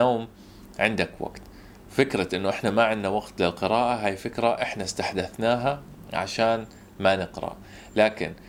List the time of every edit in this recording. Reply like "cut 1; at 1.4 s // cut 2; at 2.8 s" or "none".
none